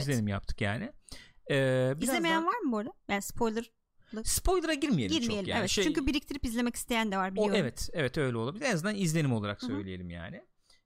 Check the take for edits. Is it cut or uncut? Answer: cut